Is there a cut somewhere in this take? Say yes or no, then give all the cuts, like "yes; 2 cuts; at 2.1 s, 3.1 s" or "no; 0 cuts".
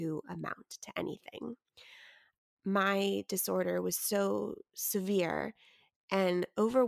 no; 0 cuts